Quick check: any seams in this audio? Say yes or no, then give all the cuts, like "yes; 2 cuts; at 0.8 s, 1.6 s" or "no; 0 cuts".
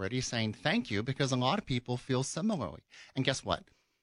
no; 0 cuts